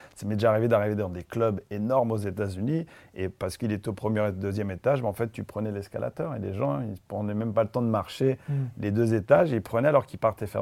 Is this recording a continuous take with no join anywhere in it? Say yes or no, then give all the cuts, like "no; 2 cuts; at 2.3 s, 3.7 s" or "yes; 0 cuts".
yes; 0 cuts